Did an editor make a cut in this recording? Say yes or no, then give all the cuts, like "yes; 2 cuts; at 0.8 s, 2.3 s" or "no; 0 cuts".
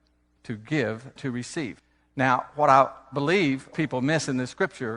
yes; 2 cuts; at 1.2 s, 3.7 s